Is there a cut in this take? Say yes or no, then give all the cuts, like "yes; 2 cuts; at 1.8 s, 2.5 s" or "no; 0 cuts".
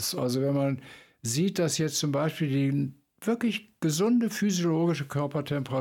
no; 0 cuts